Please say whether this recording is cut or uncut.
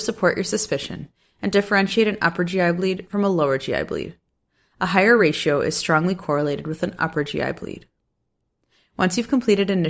uncut